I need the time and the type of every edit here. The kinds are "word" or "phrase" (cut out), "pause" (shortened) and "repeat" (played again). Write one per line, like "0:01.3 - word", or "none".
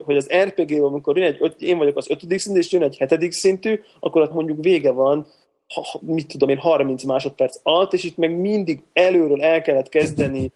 0:04.3 - word